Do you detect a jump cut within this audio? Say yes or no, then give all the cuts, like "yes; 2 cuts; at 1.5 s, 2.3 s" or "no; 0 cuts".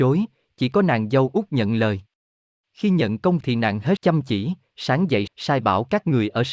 yes; 3 cuts; at 3.4 s, 4.0 s, 5.3 s